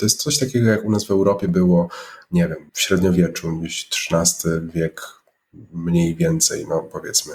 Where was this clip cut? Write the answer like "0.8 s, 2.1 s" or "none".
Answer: 2.7 s